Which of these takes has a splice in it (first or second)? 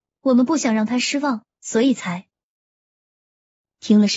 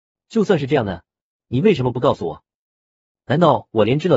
second